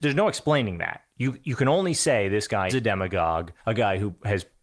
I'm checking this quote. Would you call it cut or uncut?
cut